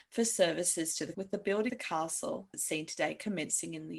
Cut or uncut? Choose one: cut